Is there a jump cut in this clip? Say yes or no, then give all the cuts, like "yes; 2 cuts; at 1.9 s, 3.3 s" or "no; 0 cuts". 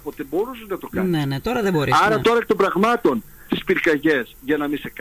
yes; 1 cut; at 3.5 s